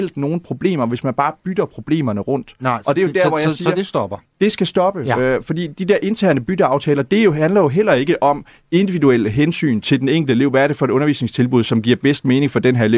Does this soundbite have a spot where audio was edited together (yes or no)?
no